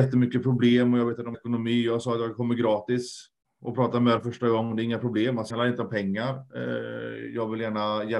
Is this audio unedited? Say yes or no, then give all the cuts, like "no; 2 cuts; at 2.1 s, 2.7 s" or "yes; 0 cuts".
no; 3 cuts; at 1.3 s, 4.2 s, 5.5 s